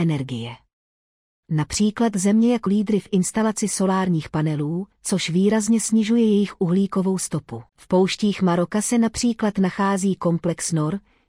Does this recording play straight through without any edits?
no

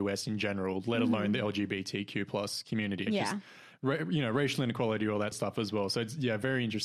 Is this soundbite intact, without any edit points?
no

